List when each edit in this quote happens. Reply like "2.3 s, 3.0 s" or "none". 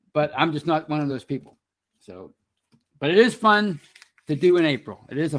none